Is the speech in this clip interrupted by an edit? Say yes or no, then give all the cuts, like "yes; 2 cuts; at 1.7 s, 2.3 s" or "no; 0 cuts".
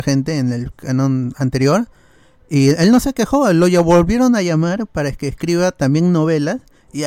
no; 0 cuts